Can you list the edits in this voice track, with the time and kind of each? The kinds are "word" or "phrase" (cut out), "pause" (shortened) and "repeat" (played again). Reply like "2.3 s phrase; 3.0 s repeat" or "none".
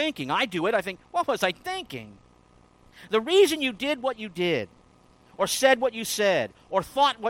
none